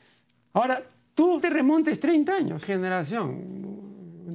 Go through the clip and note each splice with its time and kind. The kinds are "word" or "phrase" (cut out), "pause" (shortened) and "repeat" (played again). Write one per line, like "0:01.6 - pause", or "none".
0:01.4 - word
0:02.6 - phrase

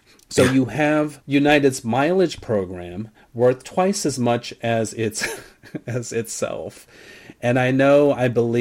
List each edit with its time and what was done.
none

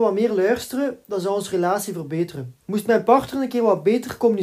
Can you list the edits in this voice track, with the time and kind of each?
0:02.6 - pause

